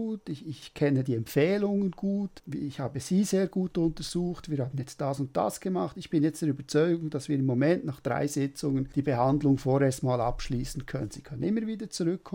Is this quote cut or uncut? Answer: uncut